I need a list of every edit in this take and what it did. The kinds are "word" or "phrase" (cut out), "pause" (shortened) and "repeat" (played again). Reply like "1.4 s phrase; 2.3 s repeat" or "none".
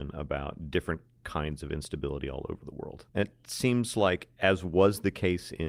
3.1 s pause